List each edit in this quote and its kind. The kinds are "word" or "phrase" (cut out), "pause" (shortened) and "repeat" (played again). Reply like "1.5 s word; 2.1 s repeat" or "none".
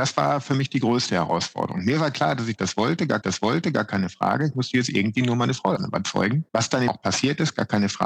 3.2 s repeat; 5.8 s word; 6.5 s pause; 6.9 s word